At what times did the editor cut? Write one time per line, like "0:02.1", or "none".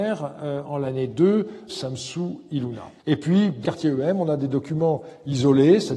0:01.7
0:03.0
0:03.6

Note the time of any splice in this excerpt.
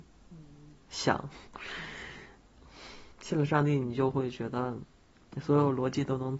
0:03.1

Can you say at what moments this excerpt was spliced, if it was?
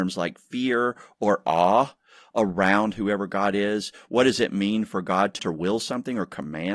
0:05.4

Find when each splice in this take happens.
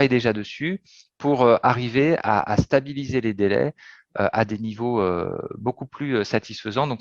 none

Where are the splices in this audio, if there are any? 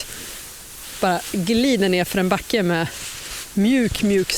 none

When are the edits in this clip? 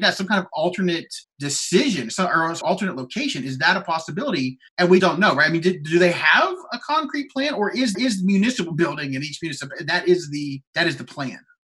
0:01.2
0:02.6
0:04.7
0:05.0
0:07.9
0:10.7

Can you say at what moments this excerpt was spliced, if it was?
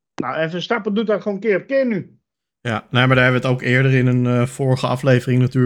0:02.3

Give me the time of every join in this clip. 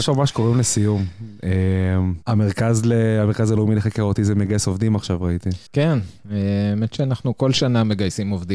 0:05.7

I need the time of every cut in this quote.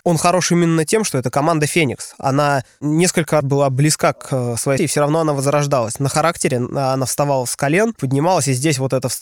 0:03.4
0:04.8
0:08.0

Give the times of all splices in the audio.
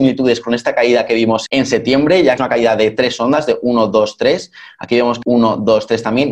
0:01.5
0:02.4
0:05.2

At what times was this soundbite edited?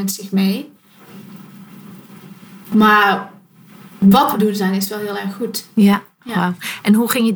0:04.3

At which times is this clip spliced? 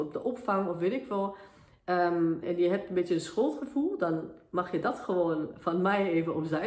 0:02.4

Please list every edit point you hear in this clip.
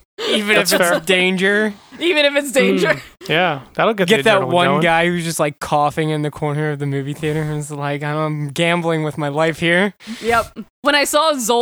none

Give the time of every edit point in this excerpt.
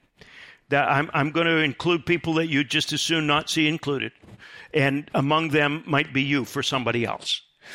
none

